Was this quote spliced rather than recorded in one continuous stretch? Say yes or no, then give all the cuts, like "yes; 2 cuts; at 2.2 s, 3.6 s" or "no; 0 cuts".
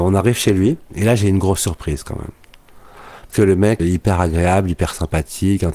yes; 2 cuts; at 3.3 s, 3.8 s